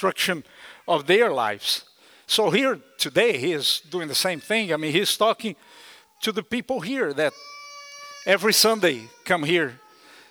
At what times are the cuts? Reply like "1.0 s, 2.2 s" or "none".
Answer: none